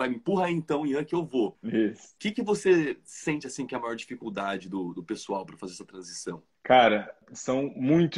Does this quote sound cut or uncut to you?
uncut